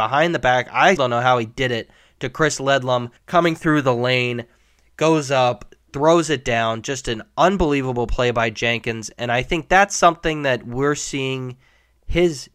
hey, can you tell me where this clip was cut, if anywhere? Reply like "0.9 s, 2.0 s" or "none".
1.0 s, 3.2 s, 5.8 s